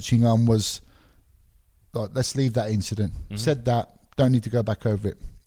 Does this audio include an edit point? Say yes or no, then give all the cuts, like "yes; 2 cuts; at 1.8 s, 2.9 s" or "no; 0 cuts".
no; 0 cuts